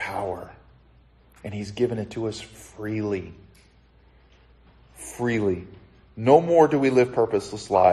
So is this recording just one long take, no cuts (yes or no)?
yes